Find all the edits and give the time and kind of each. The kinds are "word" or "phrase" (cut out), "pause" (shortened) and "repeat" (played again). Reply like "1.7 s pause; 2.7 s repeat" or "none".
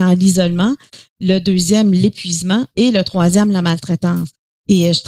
none